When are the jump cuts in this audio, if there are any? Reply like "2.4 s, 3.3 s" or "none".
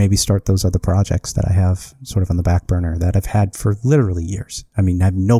none